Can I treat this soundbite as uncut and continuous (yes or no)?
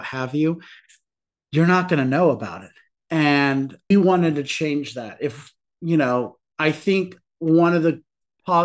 no